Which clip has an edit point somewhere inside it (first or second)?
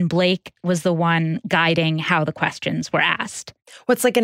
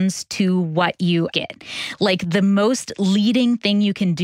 second